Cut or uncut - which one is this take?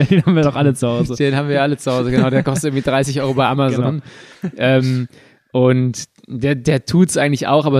uncut